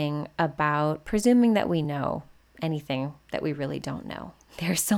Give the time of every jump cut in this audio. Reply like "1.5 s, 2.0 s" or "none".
none